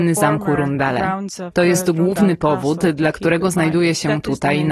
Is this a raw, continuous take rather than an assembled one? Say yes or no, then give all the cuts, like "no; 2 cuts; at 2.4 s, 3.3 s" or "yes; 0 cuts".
yes; 0 cuts